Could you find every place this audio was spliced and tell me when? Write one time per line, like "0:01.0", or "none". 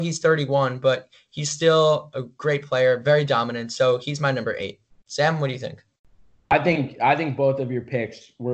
none